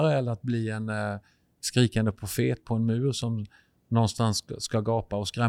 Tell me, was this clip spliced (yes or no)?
no